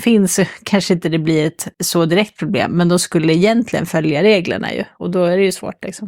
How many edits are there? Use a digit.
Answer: 1